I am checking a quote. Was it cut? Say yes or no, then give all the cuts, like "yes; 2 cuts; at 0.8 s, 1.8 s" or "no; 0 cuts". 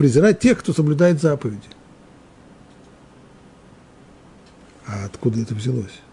no; 0 cuts